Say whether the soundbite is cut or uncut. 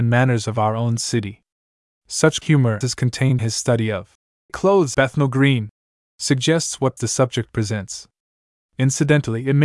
cut